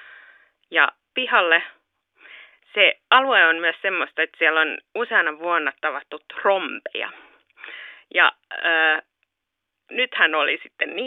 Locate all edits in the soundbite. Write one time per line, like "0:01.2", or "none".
0:01.1